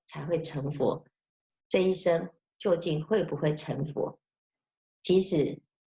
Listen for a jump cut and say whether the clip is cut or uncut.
uncut